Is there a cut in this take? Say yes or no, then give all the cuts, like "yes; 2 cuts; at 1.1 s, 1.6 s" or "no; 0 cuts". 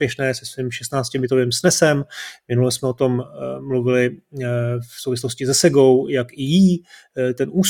no; 0 cuts